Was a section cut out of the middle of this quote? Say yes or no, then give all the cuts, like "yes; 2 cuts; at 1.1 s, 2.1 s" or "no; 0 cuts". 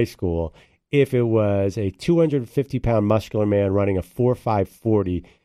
no; 0 cuts